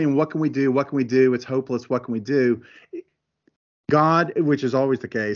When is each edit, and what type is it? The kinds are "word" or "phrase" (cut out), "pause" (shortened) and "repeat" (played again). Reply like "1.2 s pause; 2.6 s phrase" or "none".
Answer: none